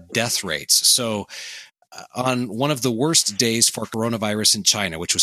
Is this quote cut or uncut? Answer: uncut